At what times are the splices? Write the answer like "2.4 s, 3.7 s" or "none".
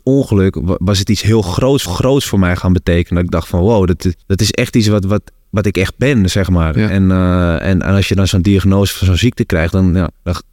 1.9 s, 4.2 s